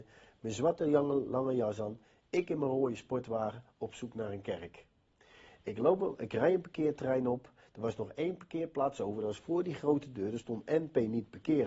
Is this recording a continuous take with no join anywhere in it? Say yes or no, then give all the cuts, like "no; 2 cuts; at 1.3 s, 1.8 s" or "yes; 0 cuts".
yes; 0 cuts